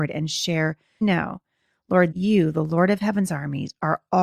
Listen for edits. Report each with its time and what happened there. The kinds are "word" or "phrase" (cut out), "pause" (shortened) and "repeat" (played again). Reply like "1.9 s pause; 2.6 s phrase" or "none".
1.0 s phrase; 2.1 s word